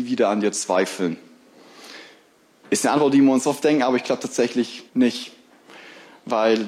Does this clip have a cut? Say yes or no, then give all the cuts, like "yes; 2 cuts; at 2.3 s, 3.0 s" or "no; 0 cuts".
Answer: yes; 1 cut; at 4.9 s